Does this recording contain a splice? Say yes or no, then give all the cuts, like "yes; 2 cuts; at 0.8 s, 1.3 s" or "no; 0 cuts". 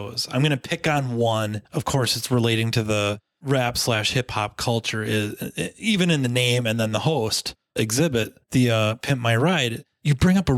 yes; 2 cuts; at 1.6 s, 8.4 s